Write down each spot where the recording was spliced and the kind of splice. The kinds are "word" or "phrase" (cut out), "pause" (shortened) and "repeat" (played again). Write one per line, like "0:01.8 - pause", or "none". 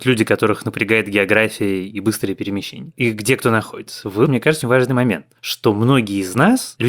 0:04.2 - word
0:04.6 - word